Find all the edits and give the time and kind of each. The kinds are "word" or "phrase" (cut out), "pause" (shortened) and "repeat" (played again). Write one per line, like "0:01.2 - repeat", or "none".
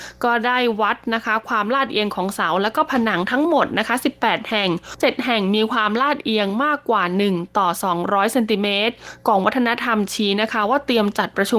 0:05.0 - phrase